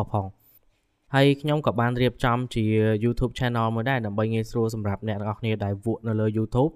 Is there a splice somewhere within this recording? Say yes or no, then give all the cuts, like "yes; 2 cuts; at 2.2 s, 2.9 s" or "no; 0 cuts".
no; 0 cuts